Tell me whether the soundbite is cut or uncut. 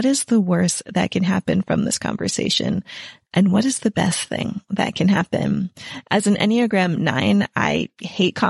uncut